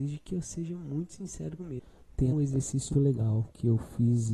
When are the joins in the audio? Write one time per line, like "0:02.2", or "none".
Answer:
0:01.6
0:02.3
0:02.9